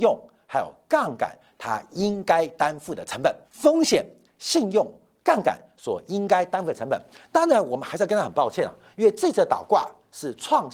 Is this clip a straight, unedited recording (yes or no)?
no